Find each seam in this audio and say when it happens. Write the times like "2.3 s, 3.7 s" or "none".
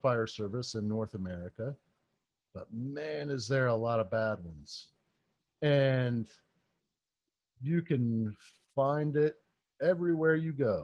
none